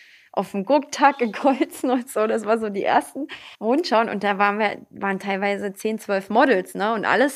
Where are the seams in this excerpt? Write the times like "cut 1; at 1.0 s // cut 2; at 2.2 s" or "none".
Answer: cut 1; at 3.5 s